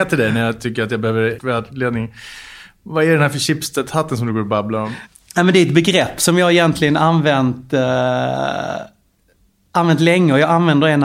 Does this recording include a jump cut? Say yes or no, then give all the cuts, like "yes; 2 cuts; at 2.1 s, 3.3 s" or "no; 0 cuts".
yes; 1 cut; at 1.4 s